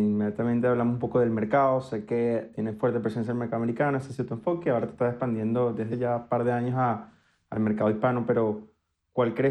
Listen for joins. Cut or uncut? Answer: cut